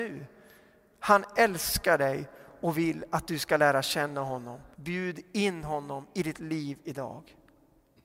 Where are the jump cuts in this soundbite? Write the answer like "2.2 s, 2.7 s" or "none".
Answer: 4.7 s